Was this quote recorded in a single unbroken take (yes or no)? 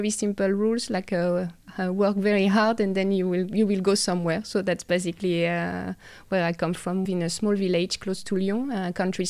no